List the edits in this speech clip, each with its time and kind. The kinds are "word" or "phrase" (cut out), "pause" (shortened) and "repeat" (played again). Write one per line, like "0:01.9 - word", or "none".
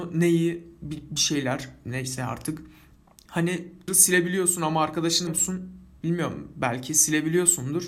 0:03.9 - word
0:05.3 - word